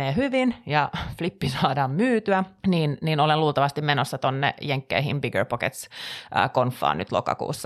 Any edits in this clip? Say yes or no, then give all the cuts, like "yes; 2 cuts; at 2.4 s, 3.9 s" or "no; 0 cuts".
yes; 1 cut; at 2.6 s